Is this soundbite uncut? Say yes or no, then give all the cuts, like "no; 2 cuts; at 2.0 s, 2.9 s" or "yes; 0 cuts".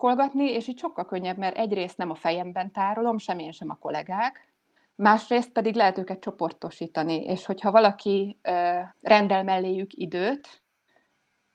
no; 2 cuts; at 4.8 s, 8.9 s